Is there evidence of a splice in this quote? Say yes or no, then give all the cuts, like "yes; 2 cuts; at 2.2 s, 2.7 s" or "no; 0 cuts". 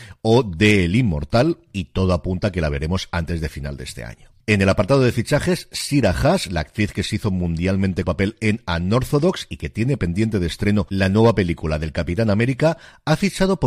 yes; 2 cuts; at 4.4 s, 8.0 s